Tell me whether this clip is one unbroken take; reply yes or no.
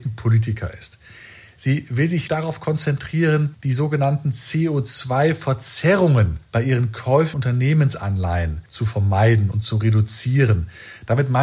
no